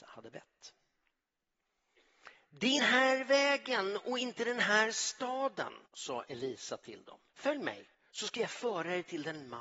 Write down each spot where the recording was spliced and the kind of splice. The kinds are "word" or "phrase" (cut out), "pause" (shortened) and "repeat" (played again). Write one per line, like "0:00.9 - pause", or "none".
0:02.8 - phrase
0:05.9 - pause
0:07.3 - pause
0:07.9 - pause